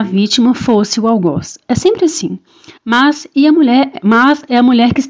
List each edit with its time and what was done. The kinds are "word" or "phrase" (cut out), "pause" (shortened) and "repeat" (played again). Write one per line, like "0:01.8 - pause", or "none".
0:02.8 - pause